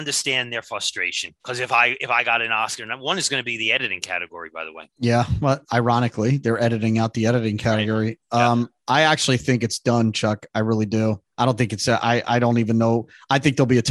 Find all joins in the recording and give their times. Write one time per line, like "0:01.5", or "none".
0:01.4
0:04.9
0:11.3